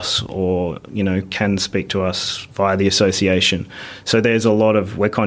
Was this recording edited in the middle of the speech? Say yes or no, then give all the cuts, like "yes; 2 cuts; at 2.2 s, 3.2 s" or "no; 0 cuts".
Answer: no; 0 cuts